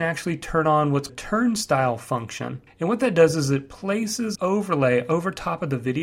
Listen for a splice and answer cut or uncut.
cut